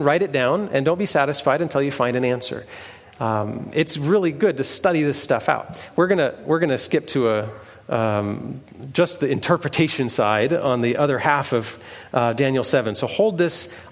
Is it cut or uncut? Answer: uncut